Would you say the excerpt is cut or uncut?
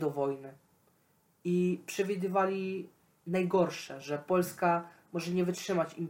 uncut